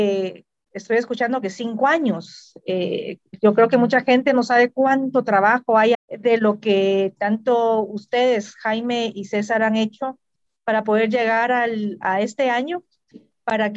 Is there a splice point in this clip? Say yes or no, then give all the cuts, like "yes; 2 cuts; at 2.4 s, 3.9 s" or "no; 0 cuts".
yes; 1 cut; at 5.9 s